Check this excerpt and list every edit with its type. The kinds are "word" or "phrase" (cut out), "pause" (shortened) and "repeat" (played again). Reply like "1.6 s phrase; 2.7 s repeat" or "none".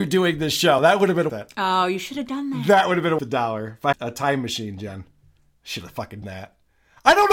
1.3 s word; 3.2 s word; 3.9 s word; 6.2 s word